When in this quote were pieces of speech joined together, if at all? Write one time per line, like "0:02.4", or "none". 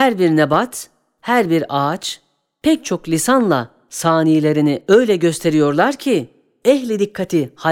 none

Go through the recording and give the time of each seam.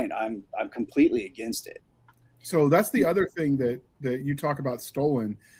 none

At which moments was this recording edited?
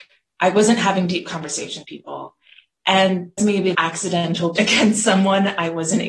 0:01.8
0:03.4
0:03.7
0:04.6

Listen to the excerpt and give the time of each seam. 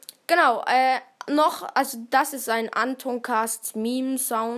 none

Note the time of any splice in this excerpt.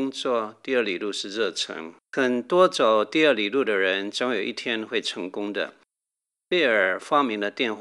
0:02.0

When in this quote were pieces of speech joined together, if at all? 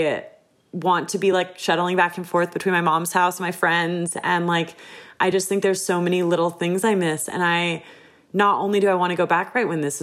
none

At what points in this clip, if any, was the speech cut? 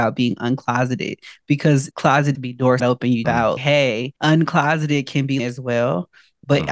0:01.9
0:02.3
0:02.8
0:03.2
0:03.6
0:04.2
0:05.4

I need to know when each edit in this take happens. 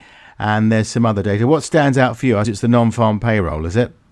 0:02.4

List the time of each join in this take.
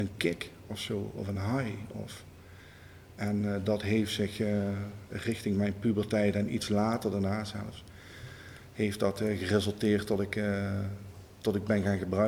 none

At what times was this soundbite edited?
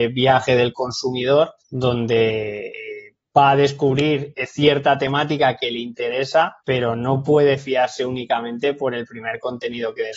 0:01.6
0:06.6

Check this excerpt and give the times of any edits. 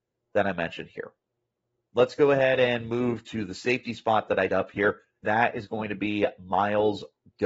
0:04.5
0:05.2

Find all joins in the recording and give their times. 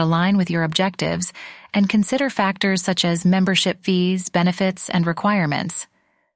none

